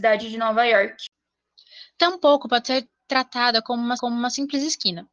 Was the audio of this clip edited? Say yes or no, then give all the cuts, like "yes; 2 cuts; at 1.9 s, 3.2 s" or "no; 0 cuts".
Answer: yes; 1 cut; at 4.0 s